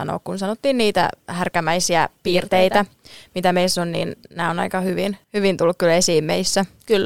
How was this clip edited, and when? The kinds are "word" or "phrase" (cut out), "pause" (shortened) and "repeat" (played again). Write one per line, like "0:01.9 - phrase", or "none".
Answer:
0:05.2 - pause